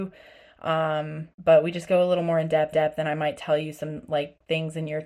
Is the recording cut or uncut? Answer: cut